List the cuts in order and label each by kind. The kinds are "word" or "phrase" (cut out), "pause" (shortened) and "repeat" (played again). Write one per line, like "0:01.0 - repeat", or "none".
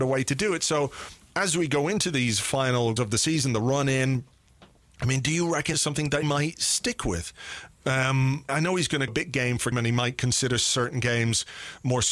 0:03.0 - word
0:05.7 - word
0:06.2 - word
0:08.5 - word
0:09.1 - word
0:09.7 - word